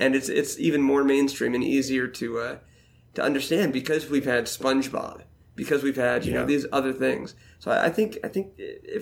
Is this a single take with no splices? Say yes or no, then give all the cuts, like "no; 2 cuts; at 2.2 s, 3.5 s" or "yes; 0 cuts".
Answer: yes; 0 cuts